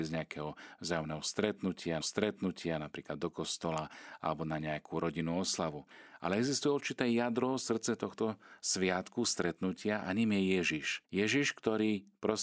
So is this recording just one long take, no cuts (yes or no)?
no